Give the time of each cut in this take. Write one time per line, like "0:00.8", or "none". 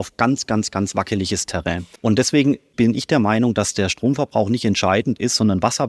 0:02.0